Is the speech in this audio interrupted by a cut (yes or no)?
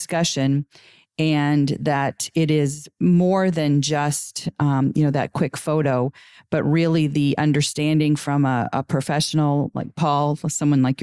no